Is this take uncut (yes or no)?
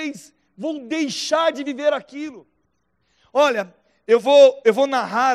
yes